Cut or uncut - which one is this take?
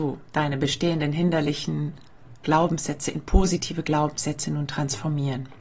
uncut